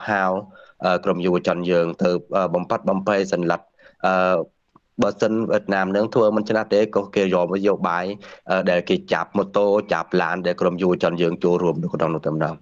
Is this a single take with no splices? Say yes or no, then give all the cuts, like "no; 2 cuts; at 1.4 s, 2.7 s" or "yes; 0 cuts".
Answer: yes; 0 cuts